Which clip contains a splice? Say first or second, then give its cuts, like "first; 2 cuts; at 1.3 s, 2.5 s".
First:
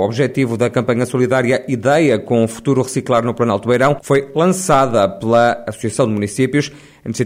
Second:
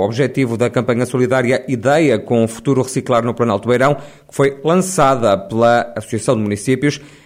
first; 1 cut; at 4.0 s